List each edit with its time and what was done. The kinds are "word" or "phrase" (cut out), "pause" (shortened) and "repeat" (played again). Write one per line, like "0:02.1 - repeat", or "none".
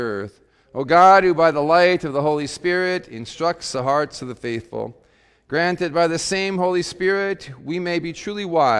none